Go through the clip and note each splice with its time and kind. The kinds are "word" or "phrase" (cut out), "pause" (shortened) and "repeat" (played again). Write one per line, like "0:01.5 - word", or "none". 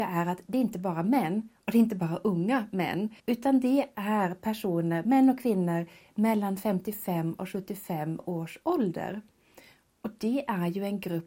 0:03.2 - pause